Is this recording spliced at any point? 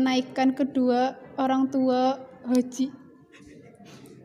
no; 0 cuts

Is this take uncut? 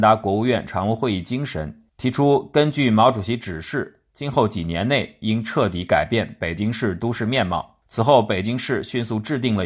no; 2 cuts; at 1.9 s, 7.8 s

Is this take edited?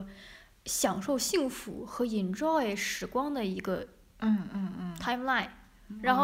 no; 0 cuts

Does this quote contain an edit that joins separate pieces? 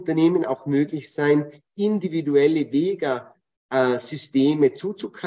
no; 0 cuts

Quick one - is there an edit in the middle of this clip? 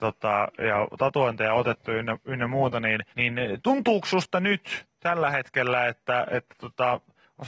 yes; 1 cut; at 3.1 s

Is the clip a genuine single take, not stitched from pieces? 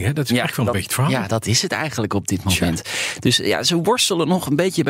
yes; 0 cuts

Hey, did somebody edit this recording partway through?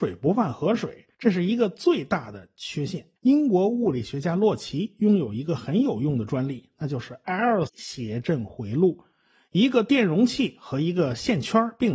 yes; 3 cuts; at 1.1 s, 3.2 s, 7.7 s

